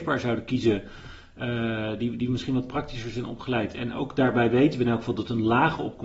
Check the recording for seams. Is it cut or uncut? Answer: uncut